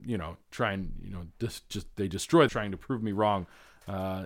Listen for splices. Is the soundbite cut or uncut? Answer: cut